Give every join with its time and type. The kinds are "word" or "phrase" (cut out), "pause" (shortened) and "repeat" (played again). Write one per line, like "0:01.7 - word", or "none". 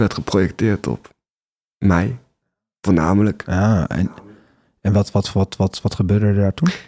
none

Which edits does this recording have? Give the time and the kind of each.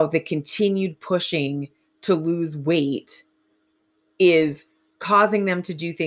none

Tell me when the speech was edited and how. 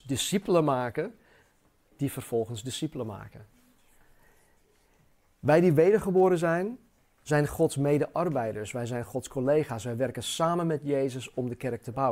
none

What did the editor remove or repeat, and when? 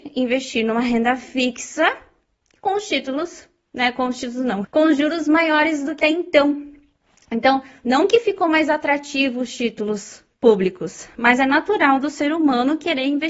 0:04.6 - word
0:06.0 - phrase

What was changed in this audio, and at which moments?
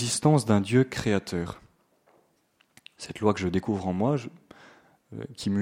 none

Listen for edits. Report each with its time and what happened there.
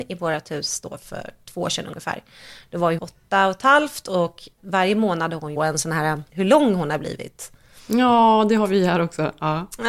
0:03.0 - word
0:04.6 - word
0:05.6 - phrase
0:06.3 - word

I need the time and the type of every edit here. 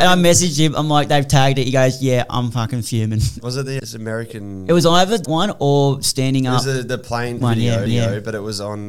0:03.8 - word
0:05.2 - word
0:07.4 - word
0:07.9 - repeat

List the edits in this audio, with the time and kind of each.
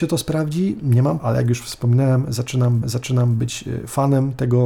0:01.2 - word
0:02.8 - repeat

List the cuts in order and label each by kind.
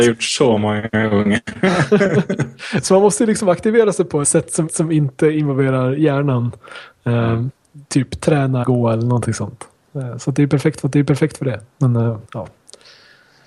0:04.2 - word
0:04.7 - repeat
0:08.6 - word
0:10.8 - repeat
0:12.2 - pause

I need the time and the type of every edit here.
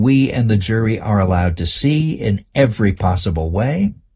none

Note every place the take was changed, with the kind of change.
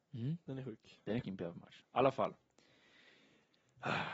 0:01.2 - word

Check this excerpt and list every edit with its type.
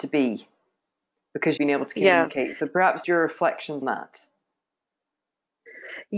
0:01.6 - word
0:03.0 - word
0:03.8 - word

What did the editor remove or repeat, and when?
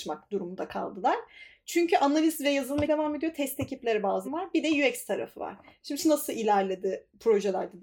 0:02.9 - word
0:04.2 - word
0:06.0 - word

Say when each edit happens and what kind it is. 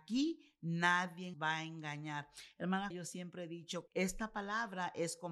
0:01.3 - word
0:02.9 - word
0:03.9 - word

